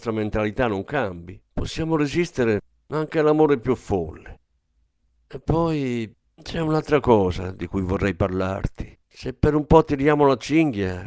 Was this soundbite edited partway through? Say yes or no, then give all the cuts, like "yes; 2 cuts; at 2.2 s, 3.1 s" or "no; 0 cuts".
yes; 3 cuts; at 1.5 s, 6.2 s, 9.0 s